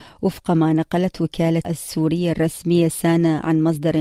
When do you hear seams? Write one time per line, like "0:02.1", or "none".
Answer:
0:01.6